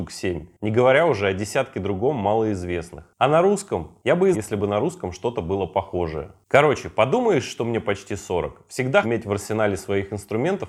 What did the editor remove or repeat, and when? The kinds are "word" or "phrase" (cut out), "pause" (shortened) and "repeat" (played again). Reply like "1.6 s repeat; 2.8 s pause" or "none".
4.3 s phrase; 9.0 s word